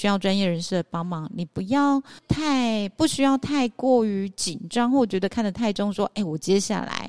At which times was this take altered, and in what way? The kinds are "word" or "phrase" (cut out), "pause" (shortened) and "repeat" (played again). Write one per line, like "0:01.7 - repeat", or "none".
0:02.2 - pause